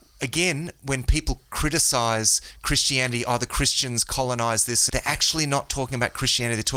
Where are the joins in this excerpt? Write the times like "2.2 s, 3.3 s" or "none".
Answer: 4.9 s